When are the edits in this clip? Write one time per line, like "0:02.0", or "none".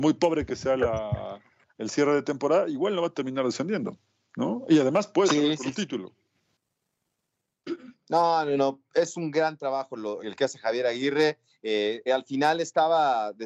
0:10.2
0:12.1